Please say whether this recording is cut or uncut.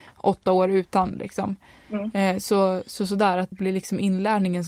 cut